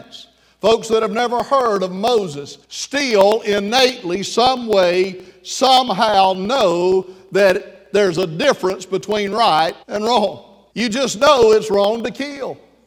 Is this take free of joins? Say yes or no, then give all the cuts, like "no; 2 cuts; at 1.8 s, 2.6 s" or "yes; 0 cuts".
no; 3 cuts; at 2.6 s, 9.8 s, 10.7 s